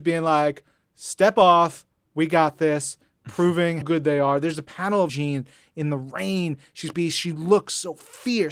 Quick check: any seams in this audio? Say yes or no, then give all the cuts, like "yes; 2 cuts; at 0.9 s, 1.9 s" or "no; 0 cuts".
yes; 3 cuts; at 3.8 s, 5.1 s, 6.9 s